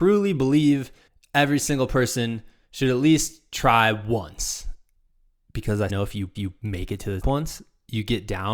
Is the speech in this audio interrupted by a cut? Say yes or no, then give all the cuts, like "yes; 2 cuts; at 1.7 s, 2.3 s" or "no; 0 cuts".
yes; 4 cuts; at 1.1 s, 5.9 s, 6.4 s, 7.2 s